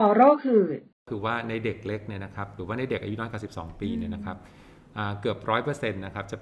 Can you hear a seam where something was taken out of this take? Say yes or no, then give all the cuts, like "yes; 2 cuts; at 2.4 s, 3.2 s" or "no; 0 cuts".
yes; 1 cut; at 1.0 s